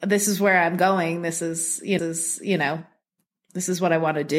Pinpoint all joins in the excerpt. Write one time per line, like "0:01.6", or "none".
0:02.0